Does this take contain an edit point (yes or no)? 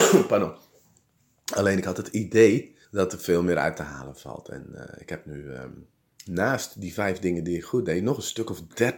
yes